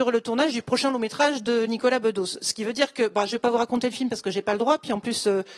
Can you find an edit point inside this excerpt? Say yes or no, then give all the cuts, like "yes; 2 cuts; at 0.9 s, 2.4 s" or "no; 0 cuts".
no; 0 cuts